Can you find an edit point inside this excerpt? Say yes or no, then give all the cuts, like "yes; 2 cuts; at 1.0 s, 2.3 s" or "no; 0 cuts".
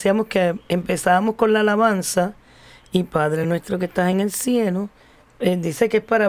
no; 0 cuts